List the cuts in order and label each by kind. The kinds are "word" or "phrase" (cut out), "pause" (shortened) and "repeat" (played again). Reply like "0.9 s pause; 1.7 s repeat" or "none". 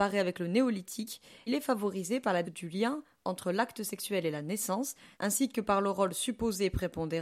1.5 s word; 2.4 s word; 5.1 s pause